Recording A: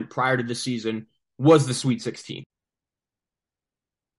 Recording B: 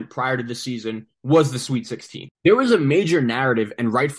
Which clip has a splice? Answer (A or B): B